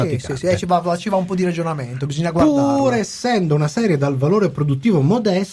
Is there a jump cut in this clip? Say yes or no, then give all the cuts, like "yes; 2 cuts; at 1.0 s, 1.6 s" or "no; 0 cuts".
no; 0 cuts